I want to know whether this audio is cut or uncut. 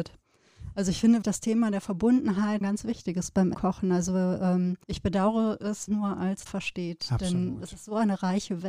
cut